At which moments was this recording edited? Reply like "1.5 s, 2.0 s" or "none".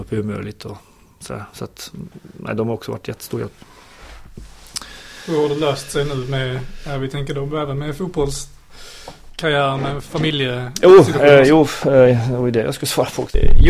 none